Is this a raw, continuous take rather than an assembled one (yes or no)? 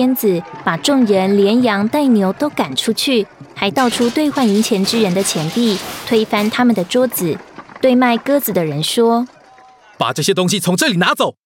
no